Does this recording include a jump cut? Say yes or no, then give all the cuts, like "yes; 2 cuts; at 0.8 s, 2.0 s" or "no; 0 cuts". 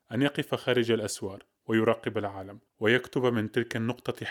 yes; 1 cut; at 2.7 s